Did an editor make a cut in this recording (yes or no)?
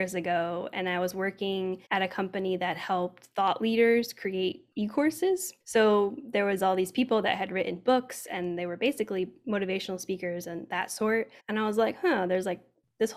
yes